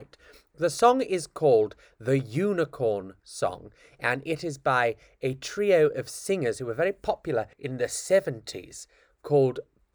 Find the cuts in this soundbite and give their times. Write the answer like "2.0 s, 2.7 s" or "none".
7.5 s